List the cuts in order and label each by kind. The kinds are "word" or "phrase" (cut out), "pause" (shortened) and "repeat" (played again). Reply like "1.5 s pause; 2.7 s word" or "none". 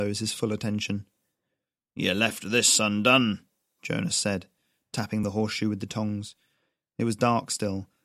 none